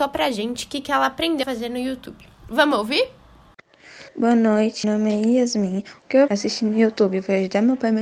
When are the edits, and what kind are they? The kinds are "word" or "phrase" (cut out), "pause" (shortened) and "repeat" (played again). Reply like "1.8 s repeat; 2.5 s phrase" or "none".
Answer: 1.4 s word; 4.1 s pause; 4.8 s word; 6.3 s word